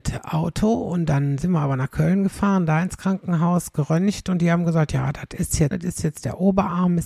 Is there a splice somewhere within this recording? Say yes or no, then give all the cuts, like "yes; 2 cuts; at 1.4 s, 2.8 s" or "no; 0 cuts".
yes; 1 cut; at 5.7 s